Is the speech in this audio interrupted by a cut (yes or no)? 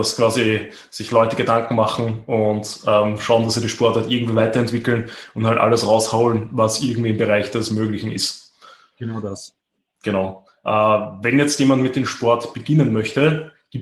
no